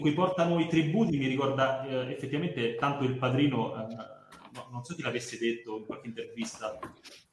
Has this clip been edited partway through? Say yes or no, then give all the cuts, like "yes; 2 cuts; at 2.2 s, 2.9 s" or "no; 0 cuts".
no; 0 cuts